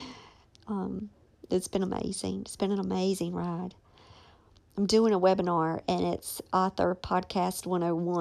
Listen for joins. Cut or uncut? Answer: uncut